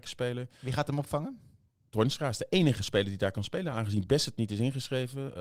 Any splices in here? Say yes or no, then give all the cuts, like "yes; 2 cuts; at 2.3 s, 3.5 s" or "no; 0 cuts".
no; 0 cuts